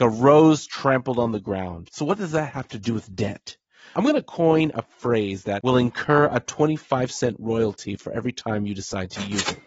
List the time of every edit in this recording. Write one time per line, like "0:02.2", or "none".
none